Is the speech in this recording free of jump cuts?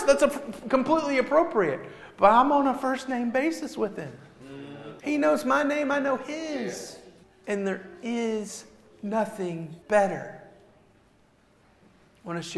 no; 3 cuts; at 5.0 s, 7.2 s, 9.8 s

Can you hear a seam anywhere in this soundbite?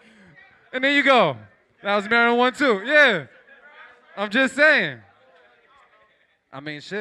no; 0 cuts

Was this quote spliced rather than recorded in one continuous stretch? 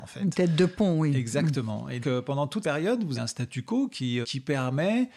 yes; 4 cuts; at 2.0 s, 2.6 s, 3.2 s, 4.2 s

